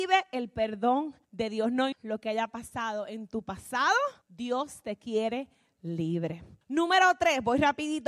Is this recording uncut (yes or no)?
no